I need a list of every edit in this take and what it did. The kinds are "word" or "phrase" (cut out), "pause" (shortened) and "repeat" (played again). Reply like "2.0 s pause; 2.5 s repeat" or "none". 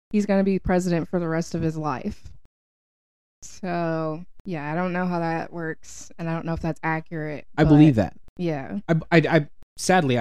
none

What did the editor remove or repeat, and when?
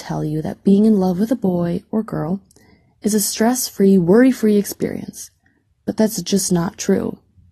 none

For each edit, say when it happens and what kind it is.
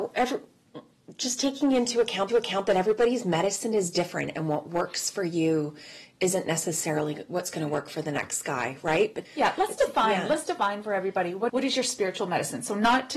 2.3 s repeat; 9.3 s word; 11.5 s word

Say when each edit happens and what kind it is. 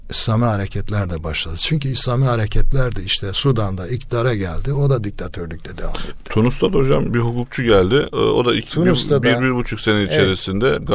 7.1 s word

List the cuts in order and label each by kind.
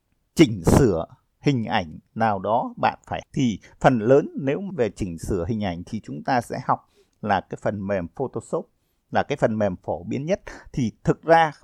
3.2 s word; 4.7 s word

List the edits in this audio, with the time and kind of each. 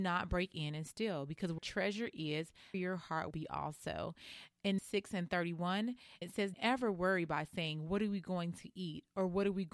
1.6 s word; 2.7 s word; 3.3 s word; 4.8 s word; 6.2 s word; 6.5 s word

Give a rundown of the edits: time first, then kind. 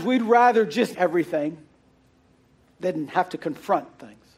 0.9 s word

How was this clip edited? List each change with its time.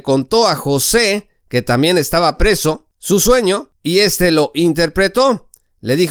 none

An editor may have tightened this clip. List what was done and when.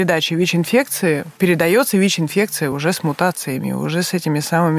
none

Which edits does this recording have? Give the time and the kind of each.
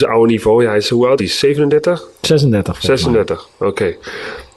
1.2 s word

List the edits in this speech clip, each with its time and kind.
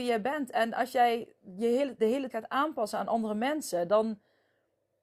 2.0 s word; 2.3 s word

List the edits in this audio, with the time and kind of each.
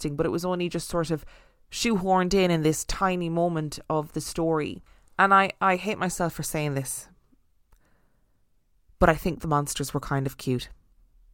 none

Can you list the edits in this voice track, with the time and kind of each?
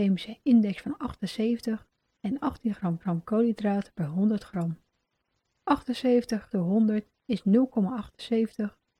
3.0 s repeat; 6.5 s word

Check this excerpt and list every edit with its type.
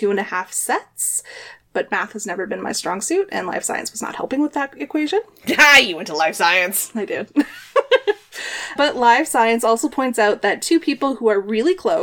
8.8 s word

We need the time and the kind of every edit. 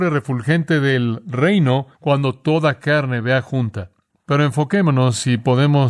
1.9 s pause; 4.1 s pause

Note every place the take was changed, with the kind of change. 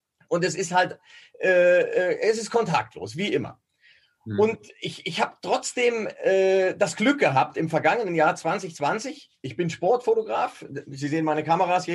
none

